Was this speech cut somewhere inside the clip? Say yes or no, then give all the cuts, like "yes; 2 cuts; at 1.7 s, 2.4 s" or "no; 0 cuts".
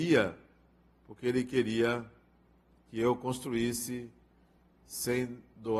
no; 0 cuts